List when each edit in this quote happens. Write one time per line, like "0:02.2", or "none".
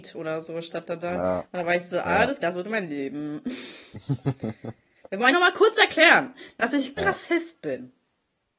0:02.4
0:05.3
0:07.0